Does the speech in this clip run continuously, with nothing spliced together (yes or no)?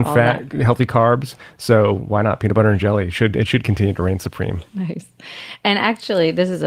yes